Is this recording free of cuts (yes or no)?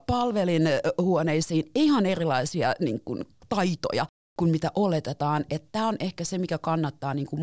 yes